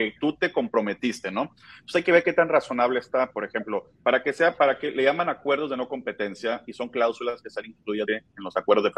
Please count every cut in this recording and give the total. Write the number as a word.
two